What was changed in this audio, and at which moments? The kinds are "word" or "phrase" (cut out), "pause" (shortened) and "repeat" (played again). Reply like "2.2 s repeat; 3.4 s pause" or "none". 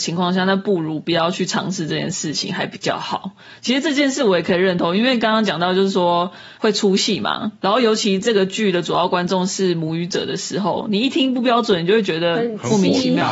6.5 s pause